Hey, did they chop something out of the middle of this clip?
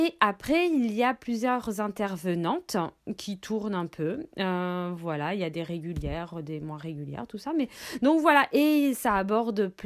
no; 0 cuts

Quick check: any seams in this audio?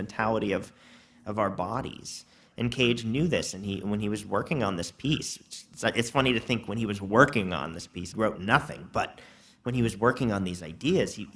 yes; 1 cut; at 8.1 s

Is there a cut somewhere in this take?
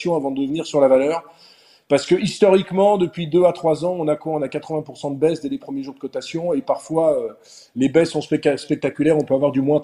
no; 0 cuts

